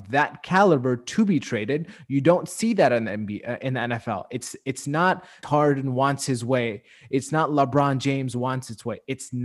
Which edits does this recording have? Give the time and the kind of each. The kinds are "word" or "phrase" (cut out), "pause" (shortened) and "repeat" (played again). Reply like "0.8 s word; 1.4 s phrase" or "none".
5.4 s word